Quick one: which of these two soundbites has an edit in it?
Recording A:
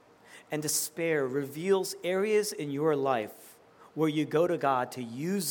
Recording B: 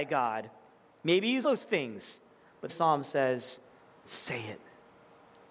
B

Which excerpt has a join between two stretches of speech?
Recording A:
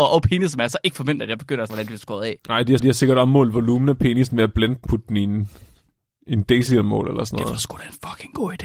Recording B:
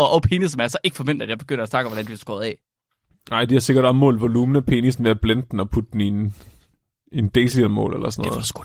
A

